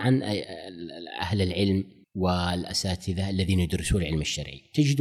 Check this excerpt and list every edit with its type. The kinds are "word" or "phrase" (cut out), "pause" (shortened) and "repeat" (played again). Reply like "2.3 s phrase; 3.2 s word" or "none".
2.0 s pause

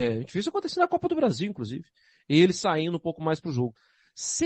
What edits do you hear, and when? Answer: none

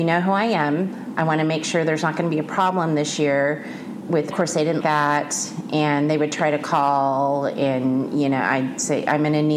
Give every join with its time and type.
4.3 s phrase; 4.8 s word

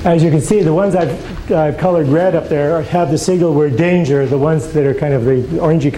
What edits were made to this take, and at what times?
none

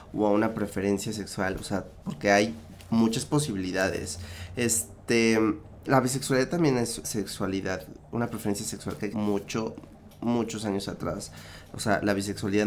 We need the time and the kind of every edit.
5.9 s word; 7.0 s word; 9.1 s word

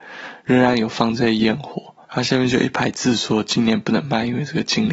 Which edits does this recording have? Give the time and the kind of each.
2.0 s pause

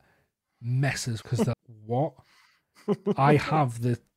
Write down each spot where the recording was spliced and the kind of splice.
1.2 s phrase; 1.5 s word

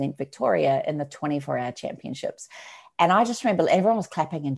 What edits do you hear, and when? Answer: none

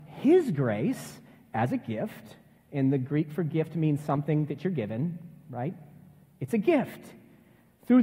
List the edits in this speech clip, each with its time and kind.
none

